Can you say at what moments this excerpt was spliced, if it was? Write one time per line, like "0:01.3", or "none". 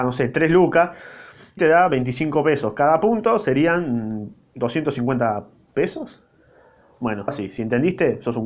0:01.6
0:07.3